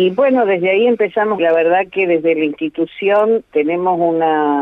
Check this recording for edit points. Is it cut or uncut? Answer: cut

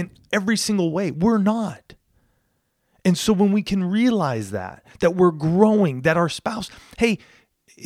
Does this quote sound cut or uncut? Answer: uncut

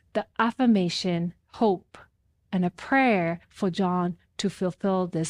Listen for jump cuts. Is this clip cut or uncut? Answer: cut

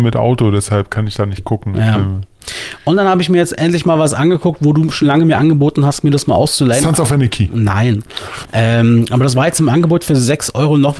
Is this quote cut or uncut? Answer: uncut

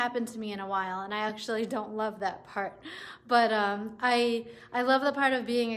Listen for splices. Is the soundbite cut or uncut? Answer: uncut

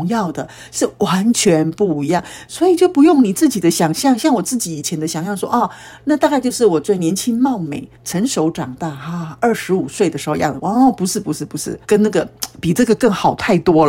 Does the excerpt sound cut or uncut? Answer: cut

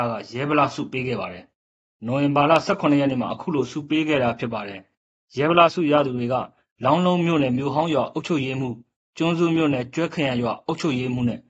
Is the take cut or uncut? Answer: cut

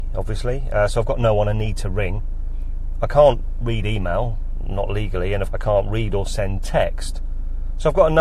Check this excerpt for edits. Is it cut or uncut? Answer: cut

